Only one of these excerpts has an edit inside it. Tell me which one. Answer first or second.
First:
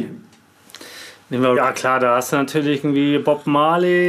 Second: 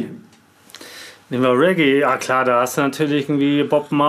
first